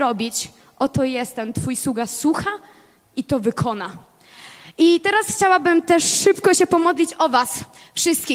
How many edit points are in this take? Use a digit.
0